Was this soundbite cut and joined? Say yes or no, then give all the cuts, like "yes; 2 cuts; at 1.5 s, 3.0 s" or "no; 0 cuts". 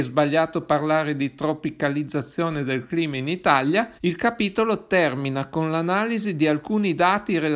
yes; 1 cut; at 4.0 s